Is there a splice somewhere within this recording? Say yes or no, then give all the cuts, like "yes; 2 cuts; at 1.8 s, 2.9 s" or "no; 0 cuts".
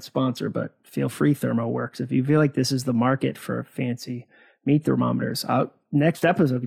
no; 0 cuts